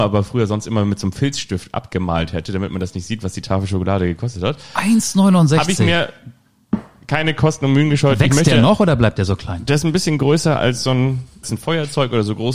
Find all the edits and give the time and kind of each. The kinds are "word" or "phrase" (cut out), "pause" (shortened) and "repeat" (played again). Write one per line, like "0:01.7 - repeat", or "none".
0:11.4 - word